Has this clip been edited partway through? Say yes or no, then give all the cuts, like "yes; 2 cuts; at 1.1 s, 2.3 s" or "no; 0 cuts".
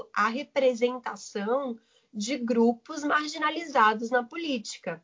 no; 0 cuts